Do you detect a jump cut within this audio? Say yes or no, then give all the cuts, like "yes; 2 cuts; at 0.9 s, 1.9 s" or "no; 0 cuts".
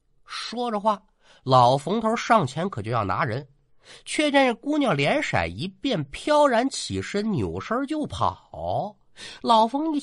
no; 0 cuts